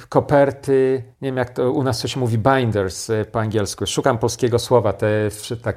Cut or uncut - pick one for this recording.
cut